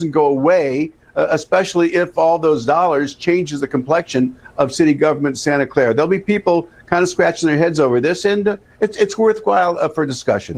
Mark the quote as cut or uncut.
uncut